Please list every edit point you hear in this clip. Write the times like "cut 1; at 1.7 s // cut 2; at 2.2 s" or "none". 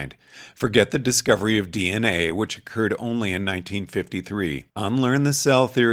cut 1; at 4.7 s